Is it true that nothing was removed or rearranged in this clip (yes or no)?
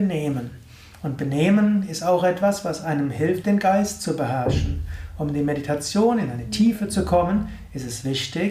yes